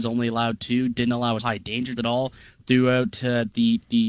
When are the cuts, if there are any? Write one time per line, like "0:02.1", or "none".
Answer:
0:01.4
0:02.0